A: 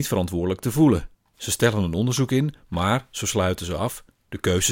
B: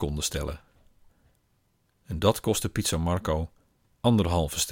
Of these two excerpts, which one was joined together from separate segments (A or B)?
A